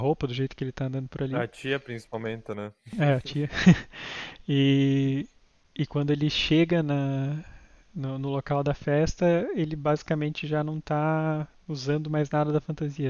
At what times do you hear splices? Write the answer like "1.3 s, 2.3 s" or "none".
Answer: none